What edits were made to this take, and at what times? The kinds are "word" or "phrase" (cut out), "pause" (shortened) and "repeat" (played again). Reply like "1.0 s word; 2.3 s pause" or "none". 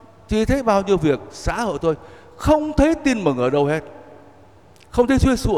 none